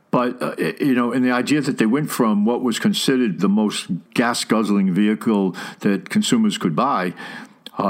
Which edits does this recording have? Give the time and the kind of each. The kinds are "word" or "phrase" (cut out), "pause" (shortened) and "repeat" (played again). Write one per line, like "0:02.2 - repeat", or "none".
0:03.4 - word
0:04.1 - pause